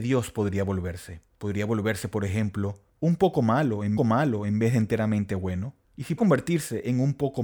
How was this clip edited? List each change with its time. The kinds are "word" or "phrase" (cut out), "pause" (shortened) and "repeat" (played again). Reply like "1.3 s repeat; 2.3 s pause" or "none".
1.3 s pause; 4.0 s repeat; 5.8 s pause; 6.2 s word